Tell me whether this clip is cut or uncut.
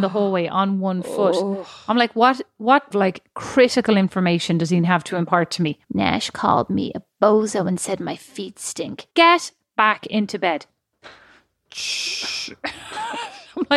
cut